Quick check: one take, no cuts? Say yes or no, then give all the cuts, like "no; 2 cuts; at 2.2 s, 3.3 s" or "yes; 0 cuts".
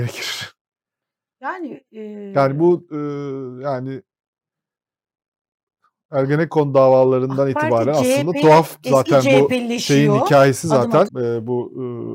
no; 1 cut; at 11.1 s